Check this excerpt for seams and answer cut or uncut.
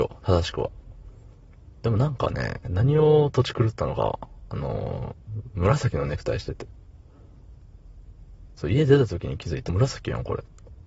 cut